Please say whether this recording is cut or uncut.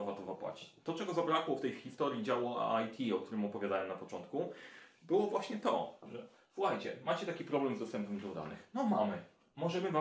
uncut